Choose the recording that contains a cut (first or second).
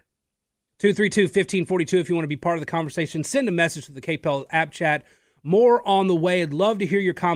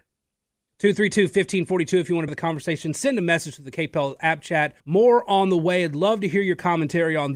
second